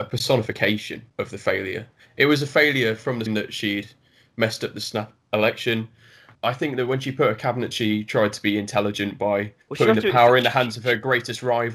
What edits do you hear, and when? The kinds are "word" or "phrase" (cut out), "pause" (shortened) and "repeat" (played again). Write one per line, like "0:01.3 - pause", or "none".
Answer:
0:01.1 - pause
0:03.3 - word
0:07.7 - word
0:09.6 - pause